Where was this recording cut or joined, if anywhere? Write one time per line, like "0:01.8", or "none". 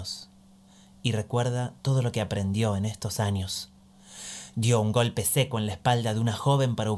0:01.8